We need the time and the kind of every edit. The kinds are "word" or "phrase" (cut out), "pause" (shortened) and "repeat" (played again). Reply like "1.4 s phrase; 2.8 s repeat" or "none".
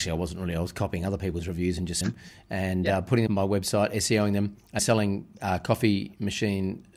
2.0 s word; 3.3 s word; 4.8 s word